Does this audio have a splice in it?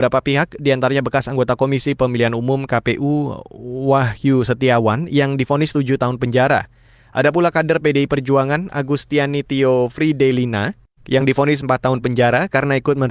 no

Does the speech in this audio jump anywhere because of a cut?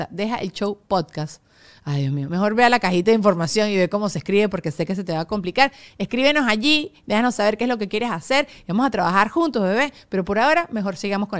no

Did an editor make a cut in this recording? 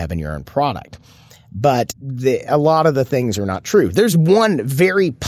no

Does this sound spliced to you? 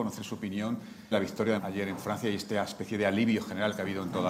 yes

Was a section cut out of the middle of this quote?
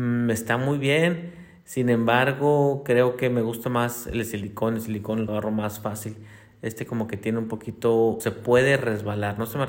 yes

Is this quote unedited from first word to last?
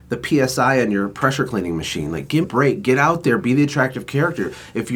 no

